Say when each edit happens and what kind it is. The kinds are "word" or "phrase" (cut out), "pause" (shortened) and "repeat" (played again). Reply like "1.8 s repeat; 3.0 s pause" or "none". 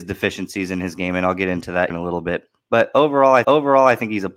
1.9 s word; 3.4 s repeat